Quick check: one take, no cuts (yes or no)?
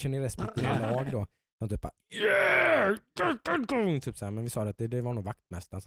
yes